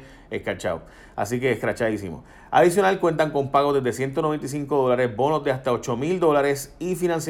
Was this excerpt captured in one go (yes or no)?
yes